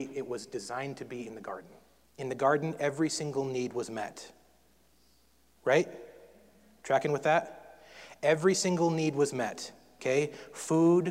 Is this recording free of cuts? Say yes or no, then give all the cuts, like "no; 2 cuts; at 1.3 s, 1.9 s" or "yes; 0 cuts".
no; 1 cut; at 2.0 s